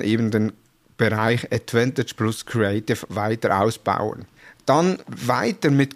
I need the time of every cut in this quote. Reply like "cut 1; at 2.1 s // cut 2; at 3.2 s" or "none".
none

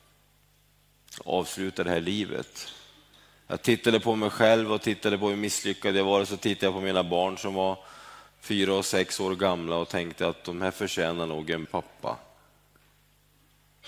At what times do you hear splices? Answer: cut 1; at 11.6 s

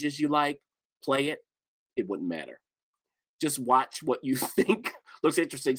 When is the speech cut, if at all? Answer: none

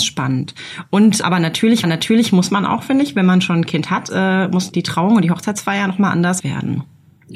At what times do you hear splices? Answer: cut 1; at 1.2 s // cut 2; at 1.8 s // cut 3; at 4.1 s // cut 4; at 4.7 s // cut 5; at 6.4 s

